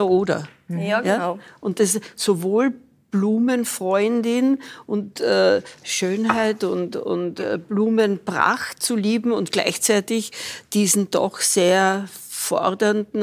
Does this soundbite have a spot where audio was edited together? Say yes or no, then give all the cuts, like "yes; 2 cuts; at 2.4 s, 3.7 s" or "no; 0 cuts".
no; 0 cuts